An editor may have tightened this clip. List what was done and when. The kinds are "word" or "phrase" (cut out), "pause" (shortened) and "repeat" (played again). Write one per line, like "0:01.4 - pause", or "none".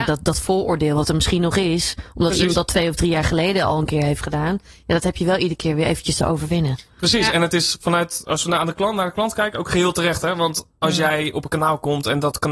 none